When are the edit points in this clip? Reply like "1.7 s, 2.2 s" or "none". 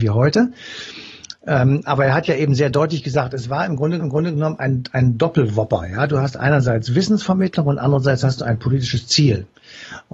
4.0 s